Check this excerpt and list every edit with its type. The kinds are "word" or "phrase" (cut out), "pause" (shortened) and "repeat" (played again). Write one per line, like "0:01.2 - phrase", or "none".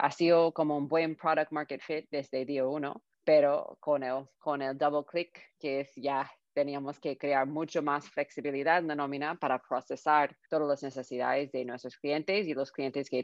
0:03.1 - pause
0:04.3 - pause
0:10.4 - pause